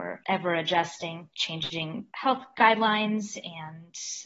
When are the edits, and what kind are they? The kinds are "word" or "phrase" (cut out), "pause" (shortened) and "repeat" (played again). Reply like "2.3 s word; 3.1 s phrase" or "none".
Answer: 1.3 s word; 2.1 s pause